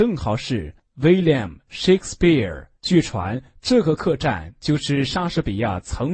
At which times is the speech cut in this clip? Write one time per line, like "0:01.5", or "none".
0:02.8